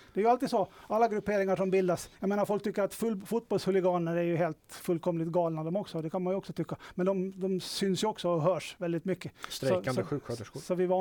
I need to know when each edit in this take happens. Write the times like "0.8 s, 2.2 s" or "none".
2.1 s